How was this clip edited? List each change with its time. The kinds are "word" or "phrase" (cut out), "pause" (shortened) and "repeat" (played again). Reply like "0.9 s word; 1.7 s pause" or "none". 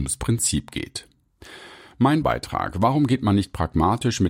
2.2 s word